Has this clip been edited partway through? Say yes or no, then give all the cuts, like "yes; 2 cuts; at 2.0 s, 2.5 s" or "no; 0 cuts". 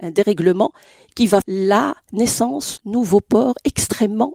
yes; 2 cuts; at 1.4 s, 2.8 s